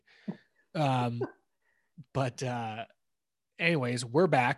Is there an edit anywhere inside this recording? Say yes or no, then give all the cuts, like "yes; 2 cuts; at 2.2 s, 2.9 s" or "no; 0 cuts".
no; 0 cuts